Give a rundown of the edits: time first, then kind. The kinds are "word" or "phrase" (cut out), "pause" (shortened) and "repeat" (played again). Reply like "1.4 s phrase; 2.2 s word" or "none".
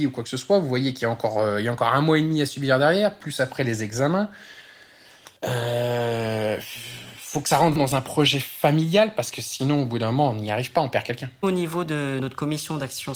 5.4 s pause; 7.8 s word